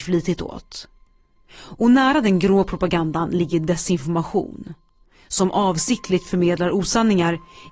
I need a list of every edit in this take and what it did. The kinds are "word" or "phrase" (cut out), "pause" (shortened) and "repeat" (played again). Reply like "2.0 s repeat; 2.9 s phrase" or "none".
none